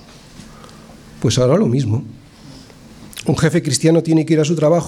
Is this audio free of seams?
yes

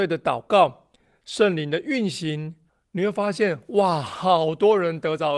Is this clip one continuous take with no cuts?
yes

